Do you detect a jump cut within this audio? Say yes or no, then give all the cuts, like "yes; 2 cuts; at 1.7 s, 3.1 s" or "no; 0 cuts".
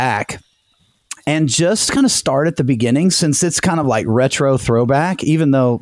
no; 0 cuts